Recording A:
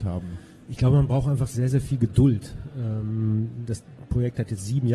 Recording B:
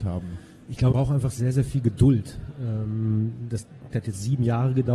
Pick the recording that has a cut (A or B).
B